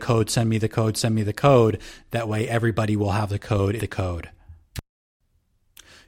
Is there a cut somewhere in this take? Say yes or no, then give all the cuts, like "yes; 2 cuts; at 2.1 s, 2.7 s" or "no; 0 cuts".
yes; 1 cut; at 3.8 s